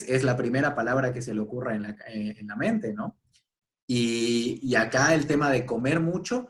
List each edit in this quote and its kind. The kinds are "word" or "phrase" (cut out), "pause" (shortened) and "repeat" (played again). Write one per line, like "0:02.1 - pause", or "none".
none